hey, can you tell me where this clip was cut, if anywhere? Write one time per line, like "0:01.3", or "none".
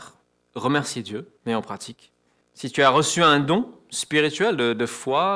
0:01.4
0:02.4